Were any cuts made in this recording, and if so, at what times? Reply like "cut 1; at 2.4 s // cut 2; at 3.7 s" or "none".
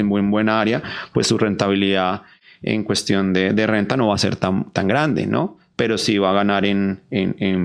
none